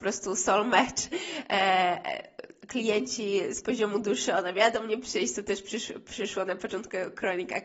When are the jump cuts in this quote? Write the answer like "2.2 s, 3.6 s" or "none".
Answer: none